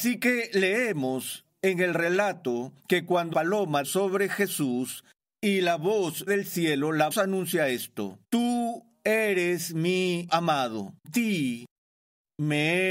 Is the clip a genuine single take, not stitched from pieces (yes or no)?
no